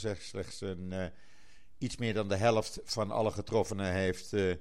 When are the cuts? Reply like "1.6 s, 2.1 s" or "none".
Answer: none